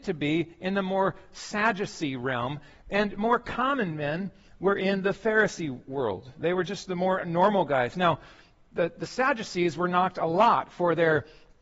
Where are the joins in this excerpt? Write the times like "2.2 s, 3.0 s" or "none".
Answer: none